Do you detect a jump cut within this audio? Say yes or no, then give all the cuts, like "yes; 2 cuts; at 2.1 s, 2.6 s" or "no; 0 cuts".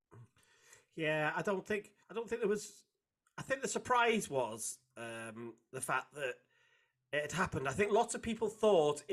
yes; 1 cut; at 2.0 s